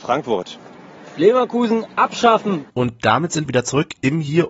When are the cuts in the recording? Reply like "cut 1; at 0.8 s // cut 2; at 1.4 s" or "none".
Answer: cut 1; at 2.7 s // cut 2; at 3.5 s